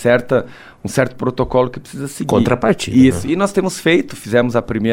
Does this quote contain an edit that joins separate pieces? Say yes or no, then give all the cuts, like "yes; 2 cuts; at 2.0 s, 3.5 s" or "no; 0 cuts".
no; 0 cuts